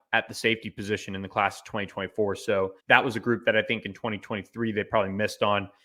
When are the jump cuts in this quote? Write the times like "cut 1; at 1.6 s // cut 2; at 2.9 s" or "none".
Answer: cut 1; at 2.8 s